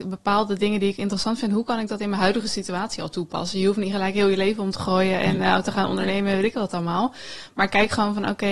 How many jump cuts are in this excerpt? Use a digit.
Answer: 0